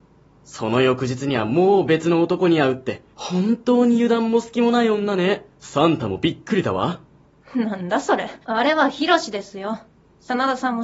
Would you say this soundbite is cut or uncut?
cut